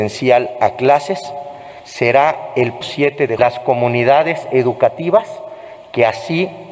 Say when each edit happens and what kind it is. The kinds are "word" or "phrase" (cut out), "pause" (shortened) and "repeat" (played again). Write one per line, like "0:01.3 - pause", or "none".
0:01.8 - pause
0:02.8 - word
0:03.4 - phrase